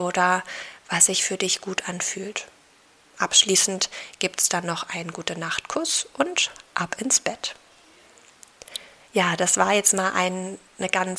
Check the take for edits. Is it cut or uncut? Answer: uncut